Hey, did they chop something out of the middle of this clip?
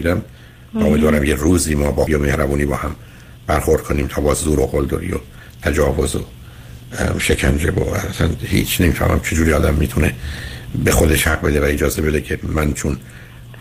yes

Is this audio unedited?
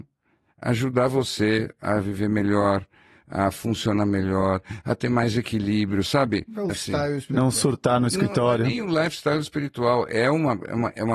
no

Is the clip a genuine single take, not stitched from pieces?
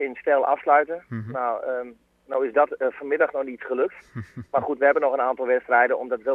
yes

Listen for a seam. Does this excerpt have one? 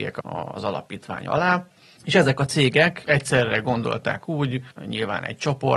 no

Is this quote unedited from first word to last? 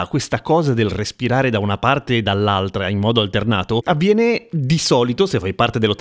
yes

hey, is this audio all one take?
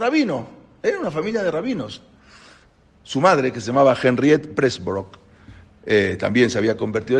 yes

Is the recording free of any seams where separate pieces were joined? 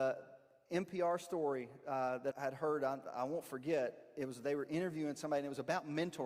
no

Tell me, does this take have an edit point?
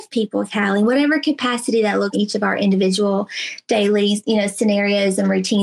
yes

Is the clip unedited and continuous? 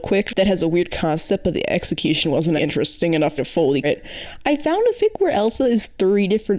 no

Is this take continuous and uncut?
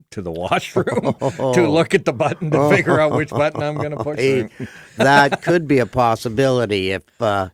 no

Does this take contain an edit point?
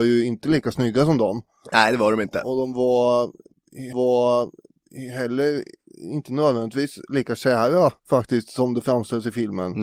yes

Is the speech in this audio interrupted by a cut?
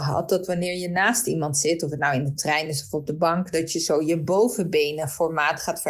no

